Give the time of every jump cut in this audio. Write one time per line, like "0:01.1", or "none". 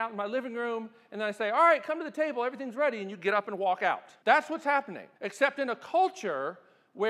0:04.2
0:05.2